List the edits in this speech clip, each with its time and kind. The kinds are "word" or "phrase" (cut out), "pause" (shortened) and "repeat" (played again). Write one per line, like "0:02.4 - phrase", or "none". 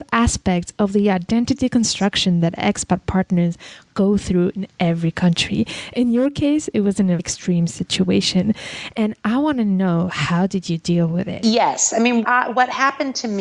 0:07.2 - word
0:12.2 - word